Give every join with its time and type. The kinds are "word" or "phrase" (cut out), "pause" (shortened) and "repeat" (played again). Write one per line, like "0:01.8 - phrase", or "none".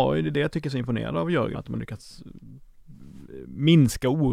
0:01.5 - word